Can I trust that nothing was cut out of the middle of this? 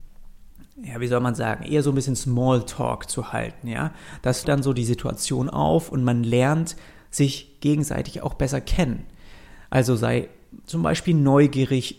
no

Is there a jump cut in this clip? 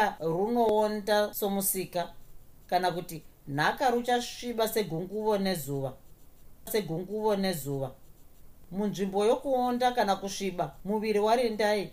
yes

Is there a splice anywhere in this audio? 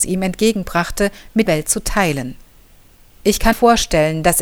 yes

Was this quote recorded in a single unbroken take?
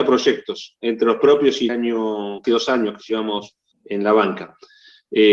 no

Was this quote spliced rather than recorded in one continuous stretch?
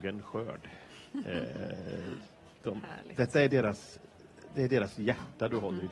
no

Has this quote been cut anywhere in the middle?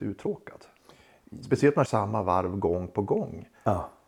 yes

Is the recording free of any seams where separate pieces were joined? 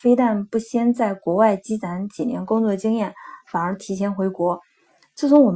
yes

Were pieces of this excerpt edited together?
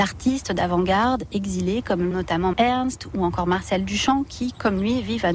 yes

